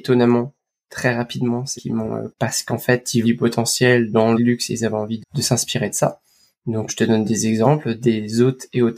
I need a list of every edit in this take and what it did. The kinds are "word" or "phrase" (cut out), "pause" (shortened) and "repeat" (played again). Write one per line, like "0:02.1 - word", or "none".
0:01.8 - word
0:02.3 - word
0:03.2 - word
0:04.4 - word
0:05.2 - word
0:06.9 - word

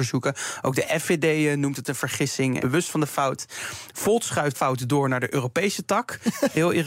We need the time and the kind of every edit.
0:02.6 - phrase
0:04.5 - word

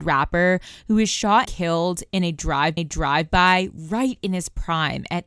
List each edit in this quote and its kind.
0:01.5 - word
0:02.8 - repeat

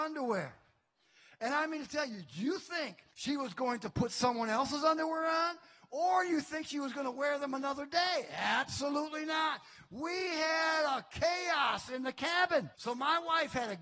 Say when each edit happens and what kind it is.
0:03.1 - pause
0:12.7 - pause

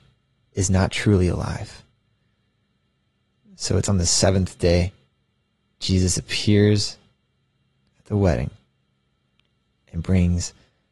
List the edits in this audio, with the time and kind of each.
0:05.8 - word

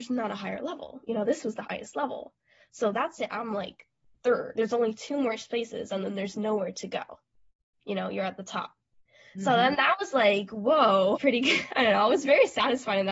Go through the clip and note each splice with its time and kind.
0:04.6 - word
0:11.2 - word

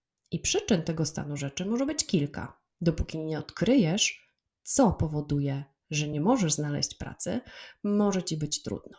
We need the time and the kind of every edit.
none

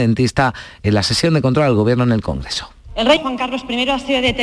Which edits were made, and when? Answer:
0:03.2 - word

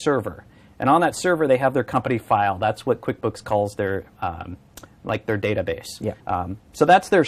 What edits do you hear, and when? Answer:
0:06.2 - pause

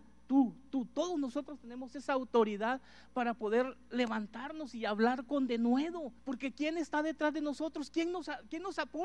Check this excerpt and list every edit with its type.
0:06.2 - pause

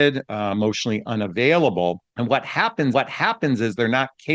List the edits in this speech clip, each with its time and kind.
0:02.1 - pause
0:02.9 - repeat

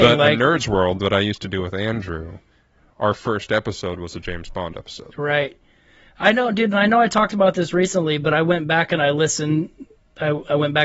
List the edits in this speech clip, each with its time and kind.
none

